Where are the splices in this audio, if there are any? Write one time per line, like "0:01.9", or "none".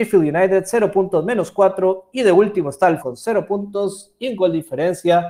0:03.0